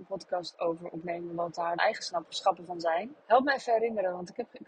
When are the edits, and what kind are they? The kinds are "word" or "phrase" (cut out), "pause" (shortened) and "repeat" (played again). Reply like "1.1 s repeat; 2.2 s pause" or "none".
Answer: 1.7 s word; 3.2 s pause